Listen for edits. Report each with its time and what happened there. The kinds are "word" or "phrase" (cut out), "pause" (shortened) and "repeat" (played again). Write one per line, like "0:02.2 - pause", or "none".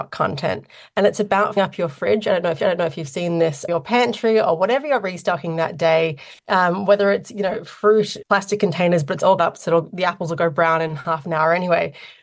0:01.6 - word
0:02.6 - repeat
0:03.7 - word
0:06.4 - pause
0:08.2 - word
0:09.4 - word